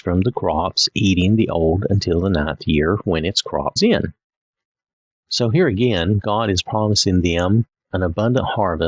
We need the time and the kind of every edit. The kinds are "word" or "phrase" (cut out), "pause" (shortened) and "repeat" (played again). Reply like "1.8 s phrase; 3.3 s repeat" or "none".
3.8 s word